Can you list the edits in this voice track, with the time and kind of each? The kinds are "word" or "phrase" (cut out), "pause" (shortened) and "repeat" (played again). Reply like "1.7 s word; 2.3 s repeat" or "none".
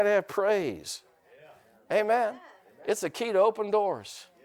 none